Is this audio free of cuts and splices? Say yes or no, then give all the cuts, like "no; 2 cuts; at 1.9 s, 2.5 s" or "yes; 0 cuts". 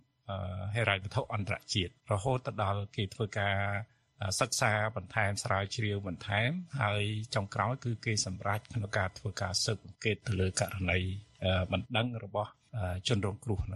no; 1 cut; at 2.0 s